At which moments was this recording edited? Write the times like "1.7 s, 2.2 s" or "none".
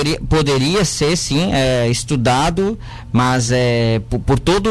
none